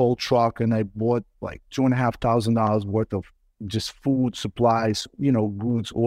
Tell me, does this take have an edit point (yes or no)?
no